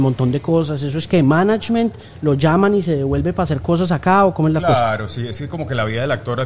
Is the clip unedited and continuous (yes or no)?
yes